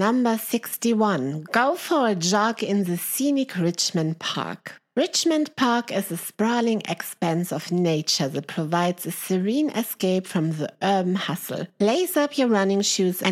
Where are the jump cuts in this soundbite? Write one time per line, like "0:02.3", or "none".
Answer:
none